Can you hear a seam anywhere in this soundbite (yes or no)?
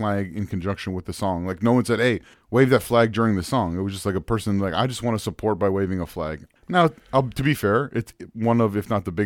yes